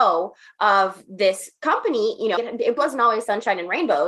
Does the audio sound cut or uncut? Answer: cut